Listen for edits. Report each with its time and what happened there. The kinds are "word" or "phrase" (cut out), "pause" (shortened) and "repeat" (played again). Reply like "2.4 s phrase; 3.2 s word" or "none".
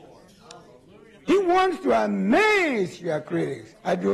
1.1 s pause